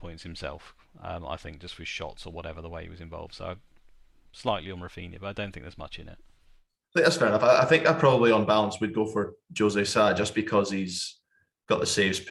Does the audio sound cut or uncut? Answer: uncut